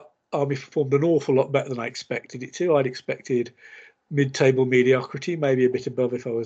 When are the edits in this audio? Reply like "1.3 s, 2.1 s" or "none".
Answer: none